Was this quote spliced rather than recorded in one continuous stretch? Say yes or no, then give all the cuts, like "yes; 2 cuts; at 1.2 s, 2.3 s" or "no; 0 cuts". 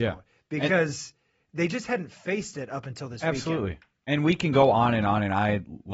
no; 0 cuts